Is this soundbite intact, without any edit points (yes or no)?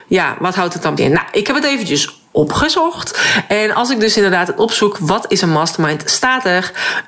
no